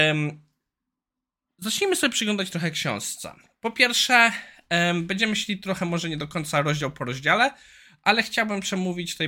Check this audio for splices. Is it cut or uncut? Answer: uncut